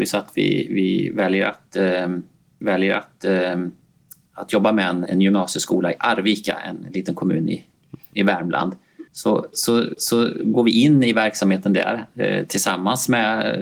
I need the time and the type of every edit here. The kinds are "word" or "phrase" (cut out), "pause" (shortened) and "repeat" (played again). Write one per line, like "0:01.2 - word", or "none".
0:02.6 - repeat
0:05.1 - word
0:09.1 - pause
0:09.9 - repeat